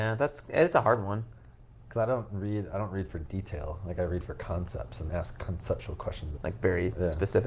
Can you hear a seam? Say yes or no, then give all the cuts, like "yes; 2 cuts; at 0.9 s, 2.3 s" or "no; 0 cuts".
yes; 2 cuts; at 5.1 s, 6.4 s